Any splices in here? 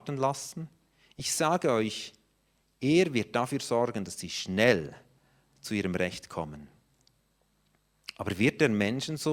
no; 0 cuts

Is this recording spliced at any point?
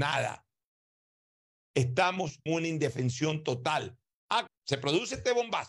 yes; 2 cuts; at 2.5 s, 4.5 s

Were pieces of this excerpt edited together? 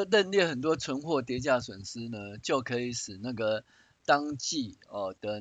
no; 0 cuts

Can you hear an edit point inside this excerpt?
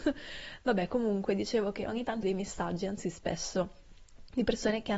yes; 1 cut; at 2.2 s

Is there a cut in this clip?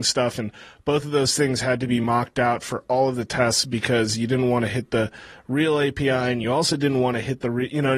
no; 0 cuts

